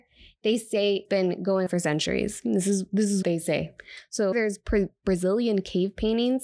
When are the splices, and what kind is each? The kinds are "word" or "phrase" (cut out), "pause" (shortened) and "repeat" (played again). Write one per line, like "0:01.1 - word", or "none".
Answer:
0:01.0 - word
0:01.7 - word
0:03.2 - word
0:04.3 - word